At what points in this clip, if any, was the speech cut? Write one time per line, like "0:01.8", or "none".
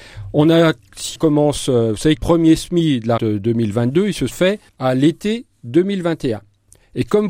0:01.2
0:02.2
0:03.2
0:04.3
0:04.7